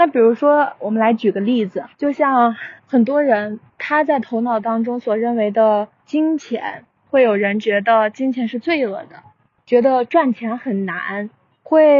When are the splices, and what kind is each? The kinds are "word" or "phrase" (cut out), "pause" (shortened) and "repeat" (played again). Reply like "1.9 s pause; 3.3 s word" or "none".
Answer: 1.9 s pause; 2.8 s pause